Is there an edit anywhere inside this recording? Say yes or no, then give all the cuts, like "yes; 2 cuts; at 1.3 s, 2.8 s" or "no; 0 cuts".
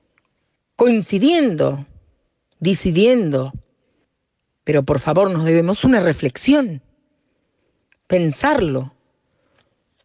no; 0 cuts